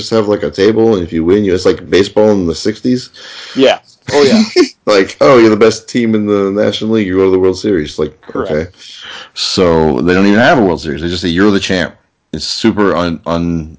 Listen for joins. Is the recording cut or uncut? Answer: uncut